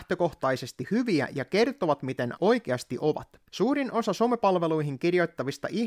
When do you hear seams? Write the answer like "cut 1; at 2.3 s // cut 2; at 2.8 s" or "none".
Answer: cut 1; at 2.4 s // cut 2; at 3.5 s